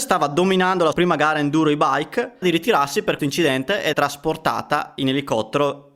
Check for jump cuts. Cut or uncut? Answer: cut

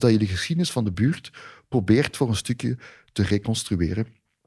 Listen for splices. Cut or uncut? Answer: uncut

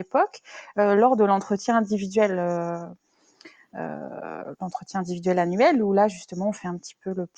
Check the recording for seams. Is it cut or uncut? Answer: uncut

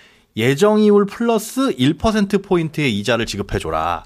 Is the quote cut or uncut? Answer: uncut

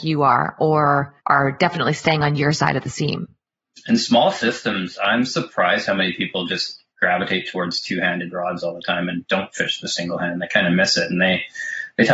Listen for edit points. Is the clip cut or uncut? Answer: cut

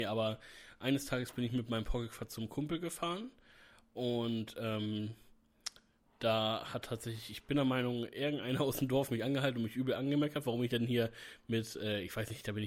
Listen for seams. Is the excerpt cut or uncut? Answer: uncut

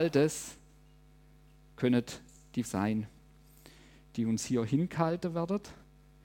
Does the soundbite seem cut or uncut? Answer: cut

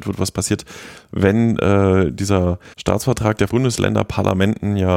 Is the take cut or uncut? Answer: cut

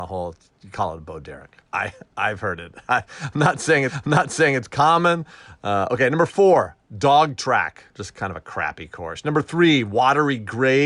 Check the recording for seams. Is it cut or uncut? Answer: cut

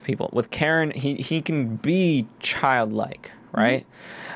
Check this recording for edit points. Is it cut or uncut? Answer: uncut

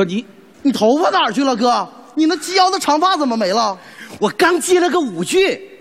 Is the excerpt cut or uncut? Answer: uncut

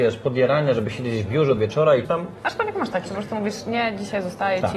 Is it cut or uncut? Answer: cut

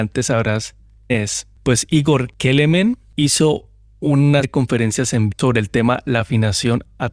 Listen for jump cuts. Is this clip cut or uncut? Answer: cut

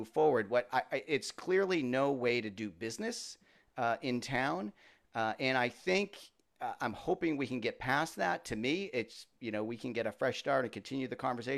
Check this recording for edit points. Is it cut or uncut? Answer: uncut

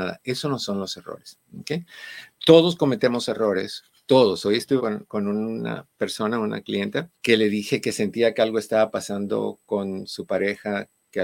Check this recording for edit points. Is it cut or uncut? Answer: cut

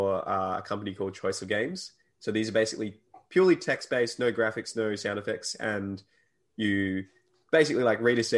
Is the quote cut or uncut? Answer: uncut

